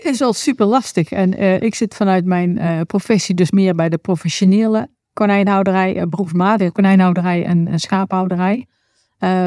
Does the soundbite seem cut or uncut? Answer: uncut